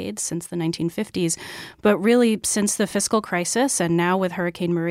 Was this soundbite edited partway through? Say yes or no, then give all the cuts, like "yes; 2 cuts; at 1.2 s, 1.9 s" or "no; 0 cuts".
no; 0 cuts